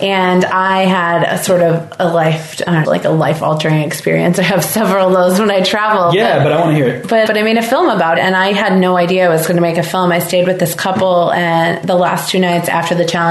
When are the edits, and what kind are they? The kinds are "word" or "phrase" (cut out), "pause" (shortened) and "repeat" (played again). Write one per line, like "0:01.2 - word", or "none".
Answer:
0:02.8 - word
0:07.3 - word
0:08.2 - word